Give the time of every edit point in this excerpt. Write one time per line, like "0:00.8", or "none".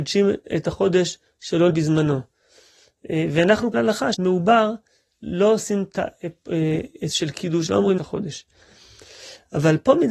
0:01.7
0:03.7
0:04.1
0:07.1
0:07.7
0:08.0